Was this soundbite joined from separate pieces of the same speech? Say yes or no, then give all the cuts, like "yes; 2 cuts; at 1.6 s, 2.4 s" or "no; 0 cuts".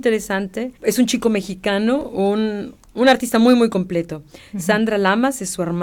no; 0 cuts